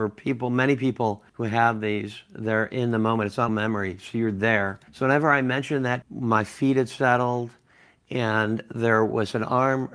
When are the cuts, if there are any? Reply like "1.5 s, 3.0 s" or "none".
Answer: 1.3 s, 3.5 s, 4.9 s, 6.0 s